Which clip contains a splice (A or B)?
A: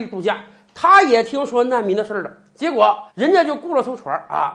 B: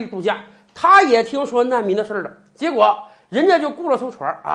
A